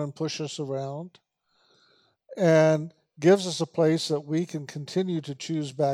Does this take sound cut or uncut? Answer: uncut